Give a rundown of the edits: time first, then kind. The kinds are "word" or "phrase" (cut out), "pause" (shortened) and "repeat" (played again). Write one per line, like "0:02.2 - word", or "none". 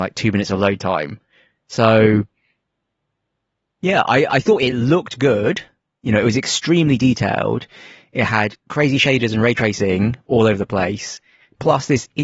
none